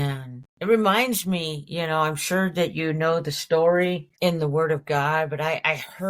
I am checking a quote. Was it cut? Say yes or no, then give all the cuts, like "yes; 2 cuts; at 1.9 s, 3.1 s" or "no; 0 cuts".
yes; 1 cut; at 4.1 s